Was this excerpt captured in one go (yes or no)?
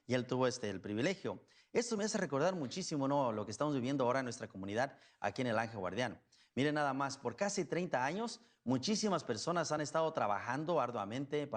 yes